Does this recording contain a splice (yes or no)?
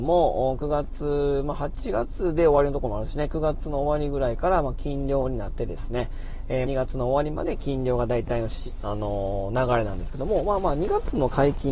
yes